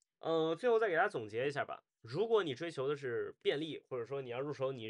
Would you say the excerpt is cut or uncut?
uncut